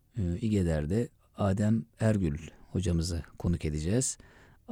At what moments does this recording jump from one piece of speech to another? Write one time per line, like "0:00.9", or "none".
0:01.9